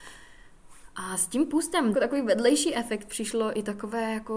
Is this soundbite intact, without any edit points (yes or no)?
no